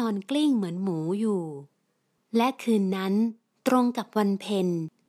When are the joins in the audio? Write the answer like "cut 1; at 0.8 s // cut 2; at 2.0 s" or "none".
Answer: none